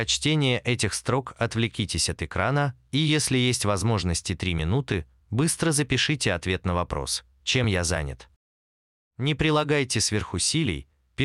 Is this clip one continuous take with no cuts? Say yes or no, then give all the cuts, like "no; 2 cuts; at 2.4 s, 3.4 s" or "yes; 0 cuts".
yes; 0 cuts